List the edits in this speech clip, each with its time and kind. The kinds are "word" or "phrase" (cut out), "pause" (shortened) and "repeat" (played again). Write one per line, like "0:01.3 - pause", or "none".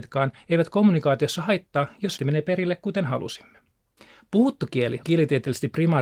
0:02.2 - word
0:04.0 - pause
0:05.0 - word